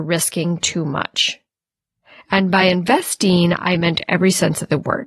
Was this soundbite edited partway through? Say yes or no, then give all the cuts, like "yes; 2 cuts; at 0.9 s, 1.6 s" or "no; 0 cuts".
no; 0 cuts